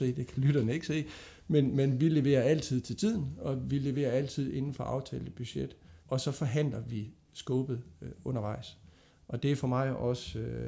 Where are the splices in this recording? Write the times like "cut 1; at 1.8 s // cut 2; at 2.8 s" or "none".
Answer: cut 1; at 6.0 s